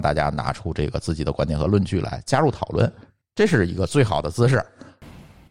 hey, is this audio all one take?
yes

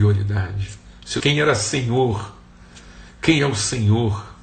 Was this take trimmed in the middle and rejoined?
yes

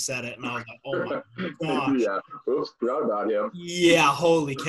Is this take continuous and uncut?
yes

